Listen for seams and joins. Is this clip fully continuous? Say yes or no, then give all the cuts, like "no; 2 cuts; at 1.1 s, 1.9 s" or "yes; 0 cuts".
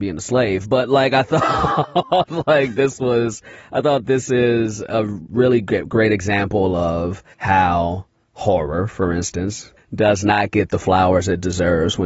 no; 2 cuts; at 7.3 s, 9.8 s